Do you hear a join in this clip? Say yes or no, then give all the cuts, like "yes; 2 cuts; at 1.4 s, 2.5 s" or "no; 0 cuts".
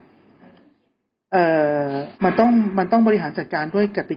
yes; 1 cut; at 2.1 s